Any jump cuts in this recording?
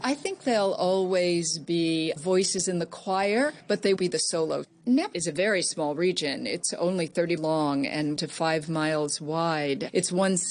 yes; 5 cuts; at 2.2 s, 4.0 s, 5.1 s, 7.4 s, 8.2 s

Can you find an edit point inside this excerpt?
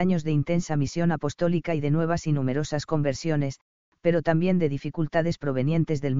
no; 0 cuts

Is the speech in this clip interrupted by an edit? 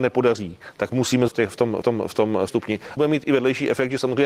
yes; 4 cuts; at 1.3 s, 1.8 s, 2.5 s, 3.0 s

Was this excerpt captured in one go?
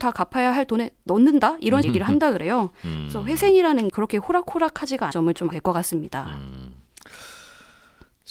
no; 4 cuts; at 1.8 s, 3.9 s, 5.1 s, 5.5 s

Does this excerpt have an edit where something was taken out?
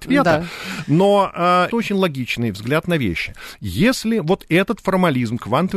yes; 1 cut; at 1.7 s

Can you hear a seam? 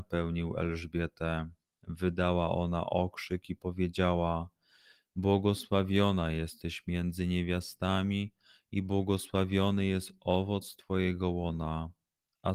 no; 0 cuts

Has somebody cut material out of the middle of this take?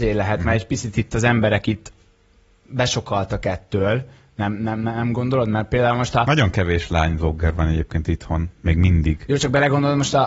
no; 0 cuts

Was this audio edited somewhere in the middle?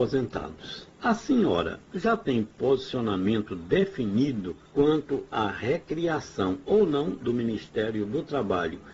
yes; 2 cuts; at 0.9 s, 4.7 s

